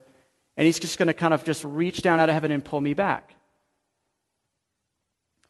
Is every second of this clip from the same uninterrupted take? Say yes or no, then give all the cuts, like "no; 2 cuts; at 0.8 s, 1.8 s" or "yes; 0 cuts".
yes; 0 cuts